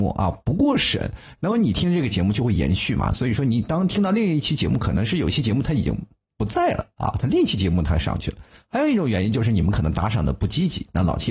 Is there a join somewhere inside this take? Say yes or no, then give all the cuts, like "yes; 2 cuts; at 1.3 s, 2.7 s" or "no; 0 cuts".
no; 0 cuts